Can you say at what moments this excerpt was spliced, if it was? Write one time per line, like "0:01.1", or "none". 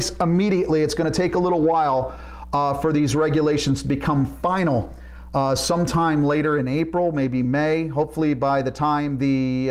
none